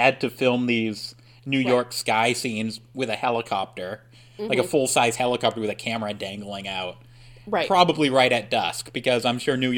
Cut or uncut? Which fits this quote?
uncut